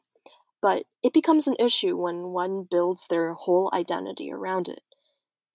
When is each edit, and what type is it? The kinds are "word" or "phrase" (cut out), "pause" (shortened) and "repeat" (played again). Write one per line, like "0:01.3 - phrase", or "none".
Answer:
0:00.9 - pause